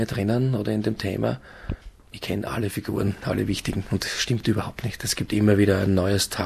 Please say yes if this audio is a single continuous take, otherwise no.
yes